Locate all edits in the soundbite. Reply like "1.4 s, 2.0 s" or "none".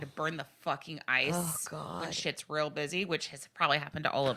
none